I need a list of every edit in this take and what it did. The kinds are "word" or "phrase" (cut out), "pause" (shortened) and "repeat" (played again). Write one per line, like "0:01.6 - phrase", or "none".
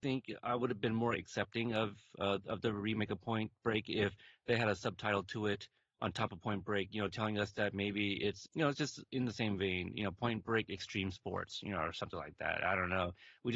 0:08.5 - word